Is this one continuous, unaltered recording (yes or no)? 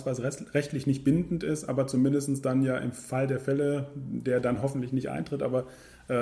yes